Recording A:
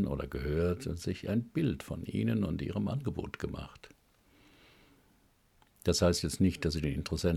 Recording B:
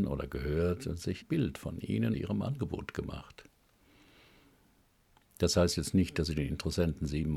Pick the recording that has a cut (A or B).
B